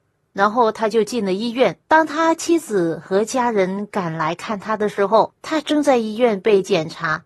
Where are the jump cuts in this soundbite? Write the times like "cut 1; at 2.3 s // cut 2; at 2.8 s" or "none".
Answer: cut 1; at 1.8 s // cut 2; at 5.4 s